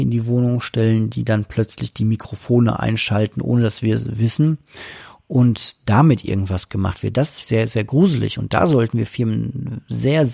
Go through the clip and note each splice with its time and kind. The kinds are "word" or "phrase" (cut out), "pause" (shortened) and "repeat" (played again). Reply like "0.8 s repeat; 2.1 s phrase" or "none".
7.4 s word